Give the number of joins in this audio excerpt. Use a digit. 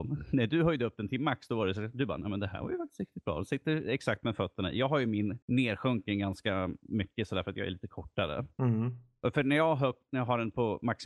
1